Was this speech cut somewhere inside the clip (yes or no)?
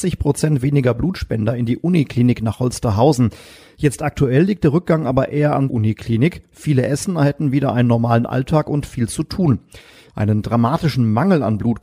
yes